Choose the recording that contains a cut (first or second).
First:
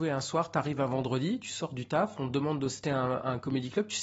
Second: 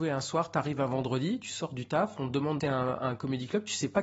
second